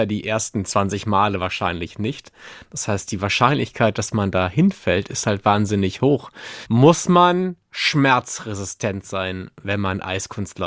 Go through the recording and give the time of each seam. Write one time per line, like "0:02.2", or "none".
none